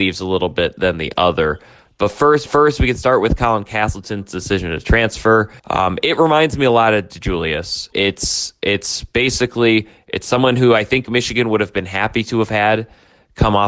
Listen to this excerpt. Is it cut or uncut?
cut